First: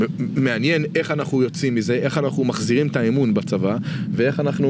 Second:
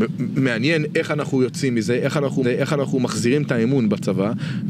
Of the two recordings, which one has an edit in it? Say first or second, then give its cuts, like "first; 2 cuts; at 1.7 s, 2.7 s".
second; 1 cut; at 2.4 s